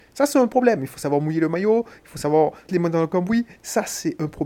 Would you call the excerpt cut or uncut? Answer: cut